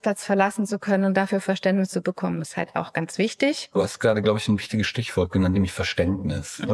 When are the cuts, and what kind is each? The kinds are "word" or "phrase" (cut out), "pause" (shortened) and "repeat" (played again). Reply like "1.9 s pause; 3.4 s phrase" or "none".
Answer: none